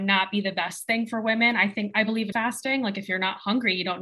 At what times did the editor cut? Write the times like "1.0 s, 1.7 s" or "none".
2.3 s